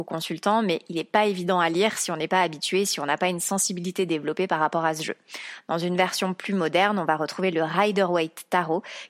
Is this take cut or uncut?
uncut